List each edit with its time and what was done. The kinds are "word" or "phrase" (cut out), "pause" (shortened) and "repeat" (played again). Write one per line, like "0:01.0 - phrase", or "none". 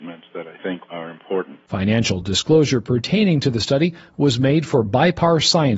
none